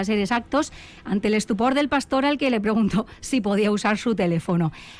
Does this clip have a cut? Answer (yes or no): no